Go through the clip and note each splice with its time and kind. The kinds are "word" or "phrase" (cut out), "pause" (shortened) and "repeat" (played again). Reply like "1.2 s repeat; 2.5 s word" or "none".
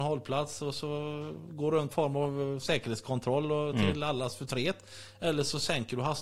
1.9 s phrase